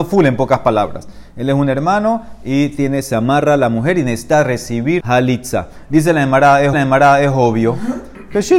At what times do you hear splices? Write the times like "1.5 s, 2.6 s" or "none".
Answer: 5.0 s, 6.7 s